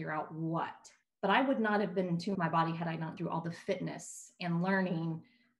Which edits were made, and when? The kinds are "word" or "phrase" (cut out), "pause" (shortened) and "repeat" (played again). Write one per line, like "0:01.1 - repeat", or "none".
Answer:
0:01.0 - pause
0:02.3 - word
0:03.2 - word